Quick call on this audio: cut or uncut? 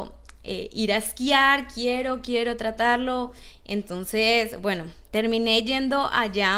uncut